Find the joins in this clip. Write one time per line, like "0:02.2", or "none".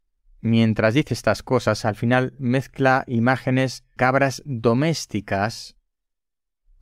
0:04.0

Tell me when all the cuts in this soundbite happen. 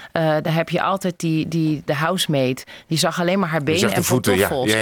0:01.9

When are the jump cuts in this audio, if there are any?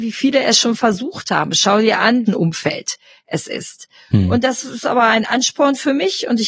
0:02.3

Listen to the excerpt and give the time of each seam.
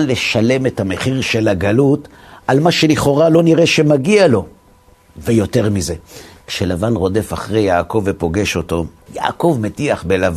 none

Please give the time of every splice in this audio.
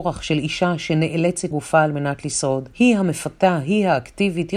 0:01.5
0:02.7

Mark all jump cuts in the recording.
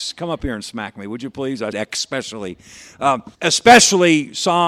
0:01.7
0:03.3

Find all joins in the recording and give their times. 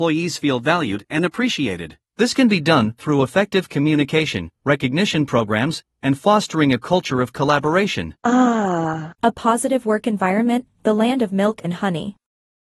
0:02.1
0:08.2
0:09.2

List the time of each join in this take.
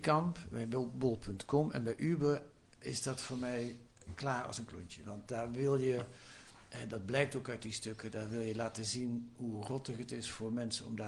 0:02.8

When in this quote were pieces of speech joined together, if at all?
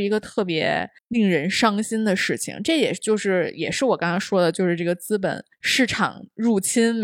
0:01.0
0:05.5

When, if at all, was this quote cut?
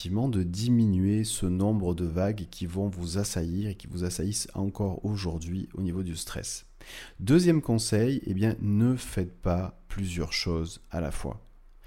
none

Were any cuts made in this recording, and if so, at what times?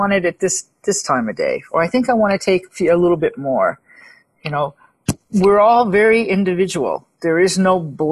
none

